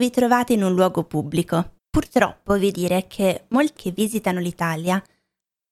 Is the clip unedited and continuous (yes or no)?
no